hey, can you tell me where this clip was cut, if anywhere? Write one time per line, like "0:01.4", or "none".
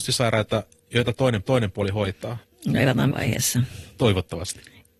0:01.4
0:02.4
0:03.1